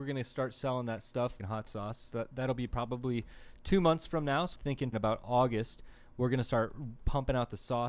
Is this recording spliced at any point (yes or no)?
yes